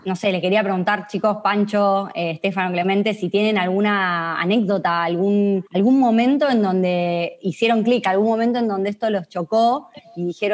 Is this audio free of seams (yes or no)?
no